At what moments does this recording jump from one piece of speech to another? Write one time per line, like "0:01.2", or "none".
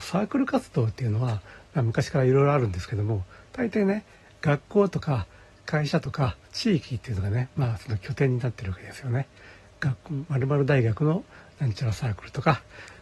0:06.4